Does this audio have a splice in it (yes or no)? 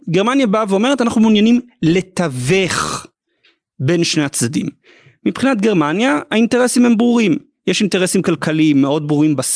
no